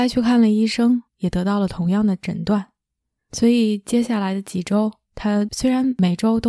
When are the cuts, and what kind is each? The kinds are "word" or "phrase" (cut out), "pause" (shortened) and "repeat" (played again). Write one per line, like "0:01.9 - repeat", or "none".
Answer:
0:01.1 - pause